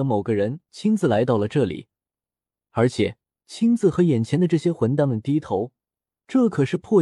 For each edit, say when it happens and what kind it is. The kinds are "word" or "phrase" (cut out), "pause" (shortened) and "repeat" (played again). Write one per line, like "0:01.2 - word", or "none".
0:03.4 - pause